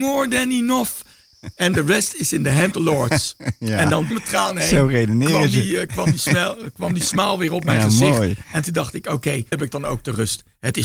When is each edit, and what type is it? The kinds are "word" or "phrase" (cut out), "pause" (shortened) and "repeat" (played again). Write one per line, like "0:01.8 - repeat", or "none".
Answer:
0:02.7 - word
0:04.1 - word
0:09.5 - word